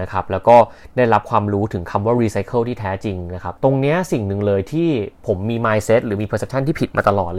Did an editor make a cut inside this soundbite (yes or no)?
yes